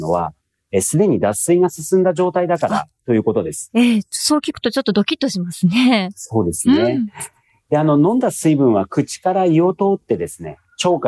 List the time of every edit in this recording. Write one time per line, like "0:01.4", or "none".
none